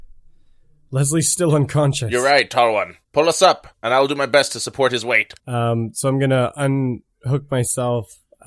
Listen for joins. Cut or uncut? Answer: cut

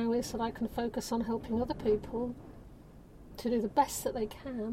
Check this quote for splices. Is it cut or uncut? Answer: uncut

